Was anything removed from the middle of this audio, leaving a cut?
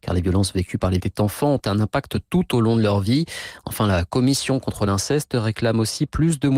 yes; 1 cut; at 1.0 s

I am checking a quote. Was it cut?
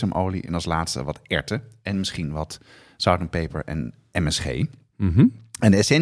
no; 0 cuts

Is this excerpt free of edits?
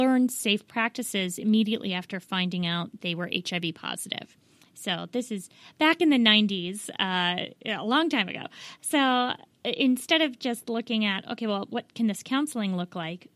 yes; 0 cuts

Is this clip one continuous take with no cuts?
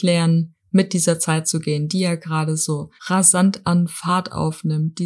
no; 1 cut; at 3.0 s

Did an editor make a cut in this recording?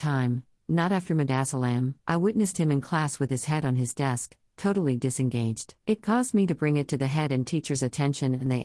yes; 2 cuts; at 2.0 s, 5.8 s

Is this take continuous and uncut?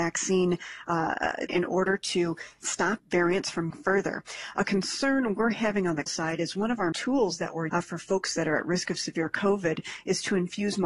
no; 6 cuts; at 1.5 s, 3.0 s, 3.7 s, 6.1 s, 6.9 s, 7.7 s

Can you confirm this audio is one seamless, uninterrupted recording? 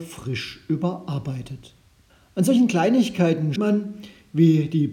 no; 2 cuts; at 2.1 s, 3.6 s

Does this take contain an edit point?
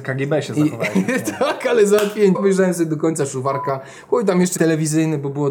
yes; 2 cuts; at 2.3 s, 4.6 s

